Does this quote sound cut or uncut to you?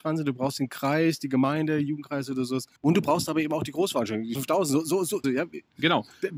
cut